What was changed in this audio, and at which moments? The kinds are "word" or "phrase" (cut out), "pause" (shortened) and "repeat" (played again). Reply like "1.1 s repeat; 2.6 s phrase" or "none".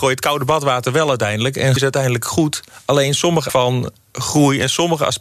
1.8 s word; 3.5 s word

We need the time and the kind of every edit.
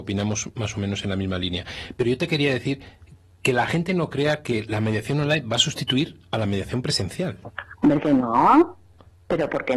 none

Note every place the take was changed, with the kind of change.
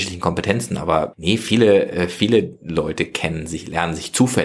1.1 s word

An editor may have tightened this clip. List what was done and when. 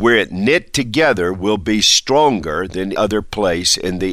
3.0 s word

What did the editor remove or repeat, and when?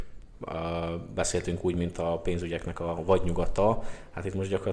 none

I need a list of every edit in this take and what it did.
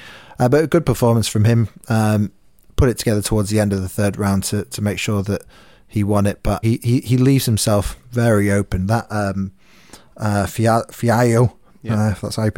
6.6 s phrase

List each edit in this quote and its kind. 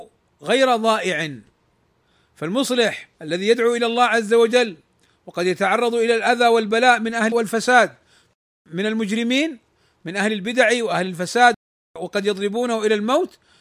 3.1 s pause; 7.3 s word

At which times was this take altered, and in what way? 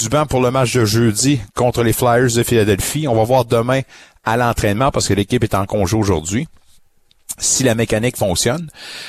none

